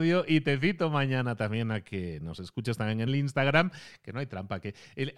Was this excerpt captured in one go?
no; 1 cut; at 3.1 s

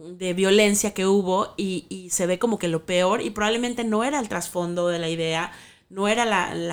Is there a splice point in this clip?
no; 0 cuts

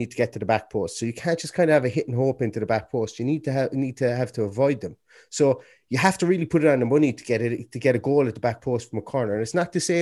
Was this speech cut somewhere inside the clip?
no; 0 cuts

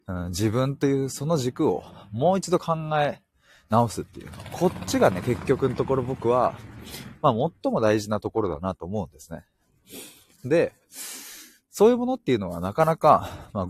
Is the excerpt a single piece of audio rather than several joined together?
yes; 0 cuts

